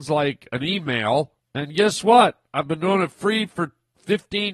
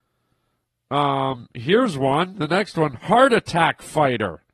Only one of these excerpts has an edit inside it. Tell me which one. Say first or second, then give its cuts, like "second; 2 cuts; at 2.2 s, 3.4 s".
first; 1 cut; at 1.4 s